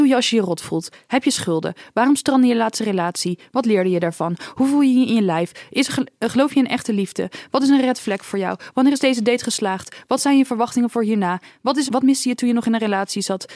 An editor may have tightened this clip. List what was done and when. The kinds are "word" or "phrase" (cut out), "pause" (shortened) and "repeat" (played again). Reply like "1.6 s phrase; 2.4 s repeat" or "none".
11.9 s word